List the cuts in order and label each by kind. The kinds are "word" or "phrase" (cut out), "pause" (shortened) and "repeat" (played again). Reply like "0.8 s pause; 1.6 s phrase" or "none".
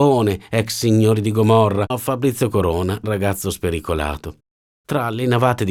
1.9 s word; 3.0 s word